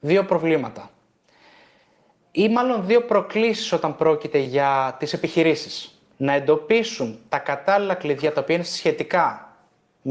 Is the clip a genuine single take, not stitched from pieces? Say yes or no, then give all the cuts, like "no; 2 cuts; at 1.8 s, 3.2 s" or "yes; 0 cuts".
no; 1 cut; at 6.1 s